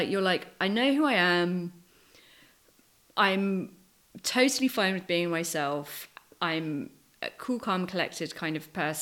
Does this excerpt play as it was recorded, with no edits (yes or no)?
yes